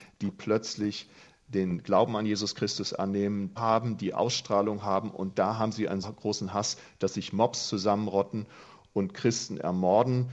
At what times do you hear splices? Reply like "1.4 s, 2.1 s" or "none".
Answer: 3.6 s, 6.0 s